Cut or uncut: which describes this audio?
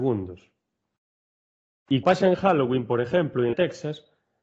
cut